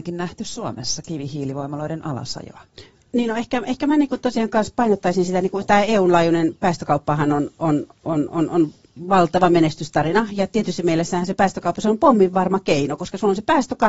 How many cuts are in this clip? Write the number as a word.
zero